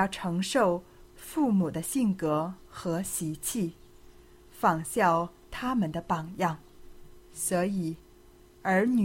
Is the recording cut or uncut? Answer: uncut